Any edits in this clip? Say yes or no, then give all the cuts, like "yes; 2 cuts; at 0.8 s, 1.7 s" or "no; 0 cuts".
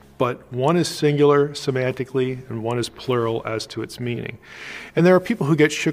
no; 0 cuts